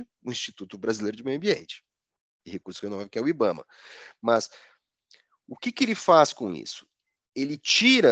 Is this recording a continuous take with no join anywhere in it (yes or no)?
yes